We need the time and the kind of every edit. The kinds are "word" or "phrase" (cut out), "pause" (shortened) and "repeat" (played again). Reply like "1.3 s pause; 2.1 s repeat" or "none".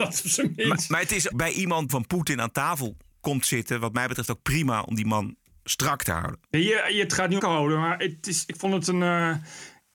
1.3 s word; 1.9 s phrase; 6.5 s pause; 7.4 s phrase